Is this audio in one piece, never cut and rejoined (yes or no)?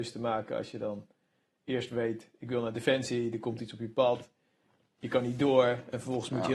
yes